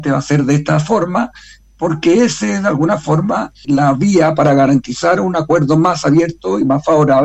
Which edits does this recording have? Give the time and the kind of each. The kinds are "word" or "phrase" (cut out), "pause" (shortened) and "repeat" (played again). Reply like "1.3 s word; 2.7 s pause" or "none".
3.6 s word